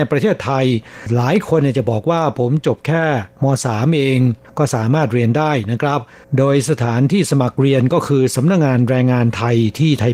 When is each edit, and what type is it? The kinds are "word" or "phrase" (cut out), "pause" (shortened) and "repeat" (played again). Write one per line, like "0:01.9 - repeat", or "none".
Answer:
none